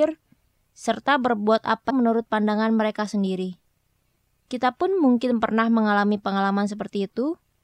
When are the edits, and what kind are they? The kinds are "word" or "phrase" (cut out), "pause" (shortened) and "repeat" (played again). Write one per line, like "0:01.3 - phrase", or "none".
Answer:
0:01.9 - phrase